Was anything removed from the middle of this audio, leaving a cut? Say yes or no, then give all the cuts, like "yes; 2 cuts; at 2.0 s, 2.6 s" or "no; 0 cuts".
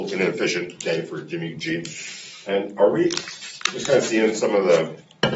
no; 0 cuts